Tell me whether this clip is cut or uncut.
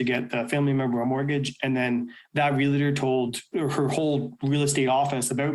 uncut